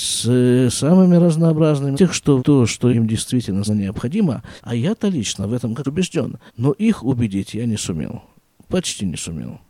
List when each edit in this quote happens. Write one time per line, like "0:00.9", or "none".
0:01.9
0:02.4
0:02.9
0:03.7
0:04.6
0:05.8
0:06.5